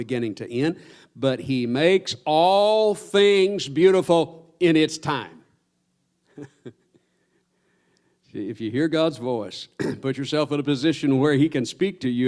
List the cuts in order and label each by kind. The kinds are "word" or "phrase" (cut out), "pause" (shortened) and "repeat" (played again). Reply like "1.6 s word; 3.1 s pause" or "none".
none

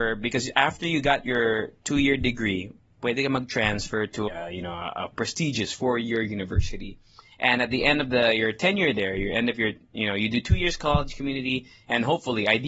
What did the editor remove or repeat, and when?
4.3 s phrase

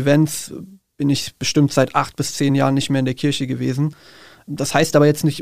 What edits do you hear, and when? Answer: none

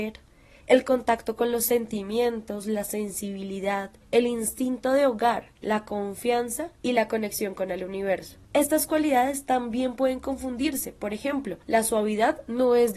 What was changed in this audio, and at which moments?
4.0 s pause; 5.6 s pause; 6.7 s pause; 8.4 s pause; 11.6 s pause

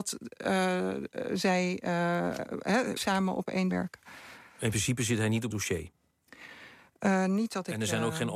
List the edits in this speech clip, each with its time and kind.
3.0 s word; 3.7 s phrase; 5.5 s word

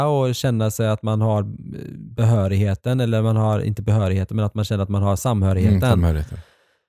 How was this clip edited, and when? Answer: none

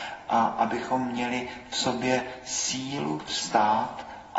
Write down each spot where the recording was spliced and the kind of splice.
none

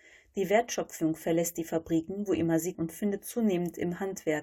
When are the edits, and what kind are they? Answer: 2.7 s word

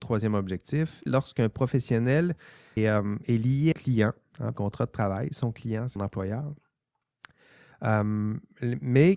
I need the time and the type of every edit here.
1.1 s word; 2.8 s word; 3.7 s phrase; 4.5 s phrase; 6.0 s phrase

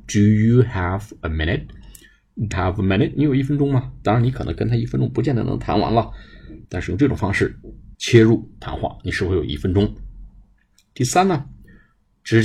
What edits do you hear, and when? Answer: 2.5 s word; 6.6 s pause; 7.9 s pause

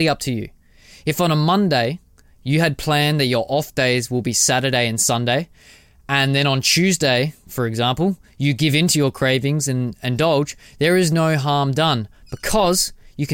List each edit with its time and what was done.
none

